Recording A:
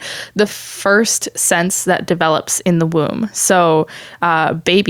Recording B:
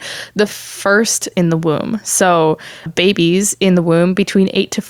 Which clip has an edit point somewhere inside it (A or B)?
B